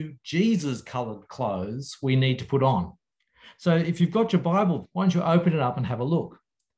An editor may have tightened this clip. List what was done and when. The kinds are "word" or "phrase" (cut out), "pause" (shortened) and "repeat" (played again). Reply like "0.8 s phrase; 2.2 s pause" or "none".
4.8 s word